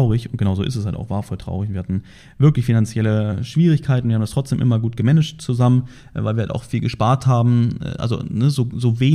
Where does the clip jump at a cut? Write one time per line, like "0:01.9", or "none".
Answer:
none